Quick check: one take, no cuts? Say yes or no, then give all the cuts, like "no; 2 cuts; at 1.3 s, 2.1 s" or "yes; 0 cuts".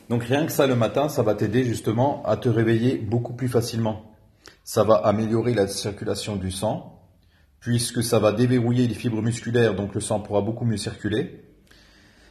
yes; 0 cuts